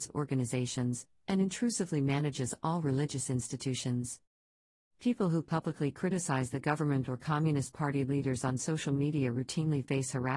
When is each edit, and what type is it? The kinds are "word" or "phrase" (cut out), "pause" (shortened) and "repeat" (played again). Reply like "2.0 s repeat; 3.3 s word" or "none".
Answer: none

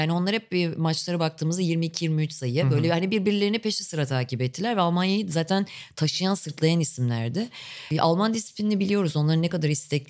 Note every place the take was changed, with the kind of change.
none

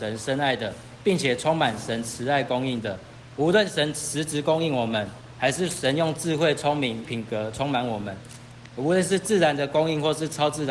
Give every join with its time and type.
7.0 s phrase

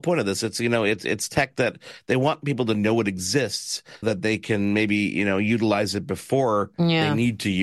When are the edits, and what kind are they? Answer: 4.0 s word

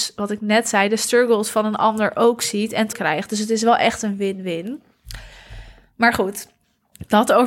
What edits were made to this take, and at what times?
2.9 s word

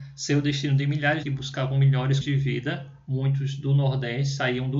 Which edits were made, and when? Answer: 1.2 s phrase; 2.2 s word

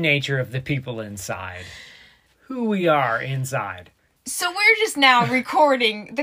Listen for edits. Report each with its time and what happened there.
none

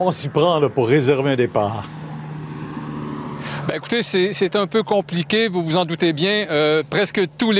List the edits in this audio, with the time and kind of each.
none

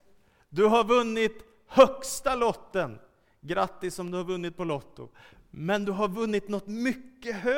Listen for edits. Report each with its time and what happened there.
none

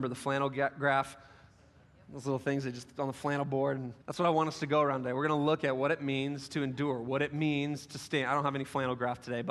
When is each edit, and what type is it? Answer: 4.0 s pause

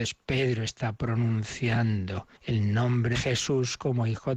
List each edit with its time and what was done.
2.4 s pause; 3.1 s word

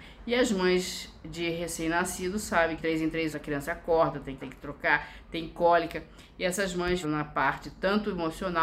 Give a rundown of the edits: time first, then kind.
2.8 s word; 3.3 s word; 4.4 s word; 7.0 s phrase

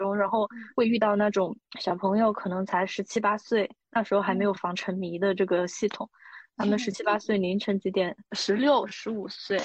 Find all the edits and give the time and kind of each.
1.7 s pause; 8.3 s pause

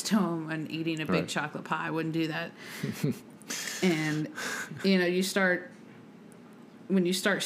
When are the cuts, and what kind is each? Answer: none

